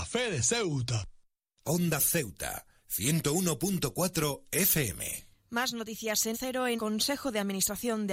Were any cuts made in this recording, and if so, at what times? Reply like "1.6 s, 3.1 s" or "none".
2.0 s, 6.3 s, 6.8 s